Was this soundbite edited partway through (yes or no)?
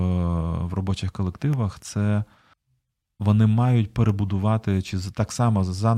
yes